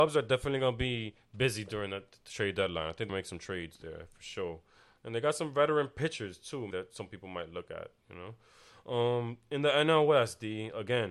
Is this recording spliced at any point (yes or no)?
yes